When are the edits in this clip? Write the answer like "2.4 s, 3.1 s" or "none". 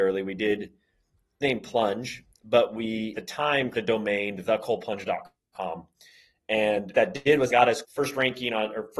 1.4 s, 3.1 s, 3.7 s, 6.9 s, 7.5 s, 7.8 s